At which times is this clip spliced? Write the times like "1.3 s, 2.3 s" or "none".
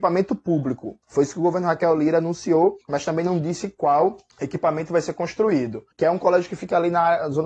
1.0 s, 2.8 s, 5.9 s

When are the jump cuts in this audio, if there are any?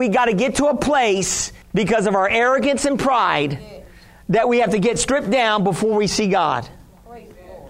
1.6 s

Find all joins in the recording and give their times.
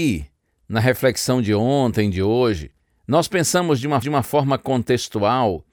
2.8 s, 4.0 s

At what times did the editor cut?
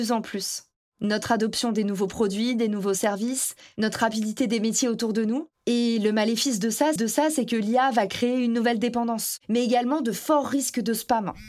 4.4 s, 7.0 s

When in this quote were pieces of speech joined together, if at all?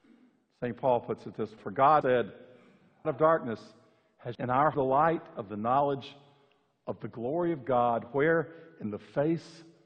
1.6 s, 2.0 s, 3.0 s, 4.3 s, 4.7 s

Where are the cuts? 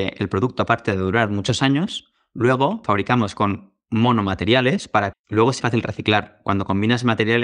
2.8 s, 5.1 s, 5.6 s

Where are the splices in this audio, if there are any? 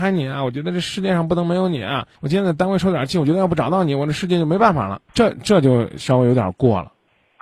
2.1 s, 5.1 s

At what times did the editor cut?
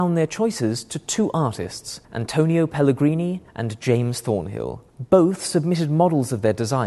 2.0 s, 3.5 s, 4.9 s

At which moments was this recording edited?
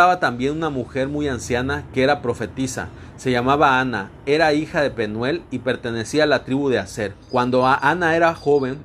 7.2 s

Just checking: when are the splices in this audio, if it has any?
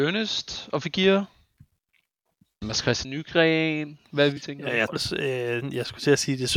2.6 s, 3.0 s, 4.4 s, 4.9 s

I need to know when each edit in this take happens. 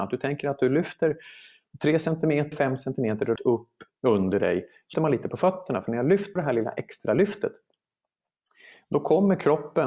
2.5 s, 3.4 s, 4.0 s, 4.9 s, 6.4 s

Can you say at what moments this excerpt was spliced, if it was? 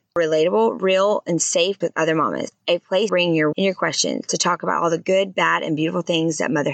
1.8 s, 3.1 s, 3.5 s

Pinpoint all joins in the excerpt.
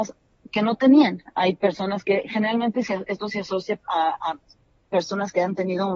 none

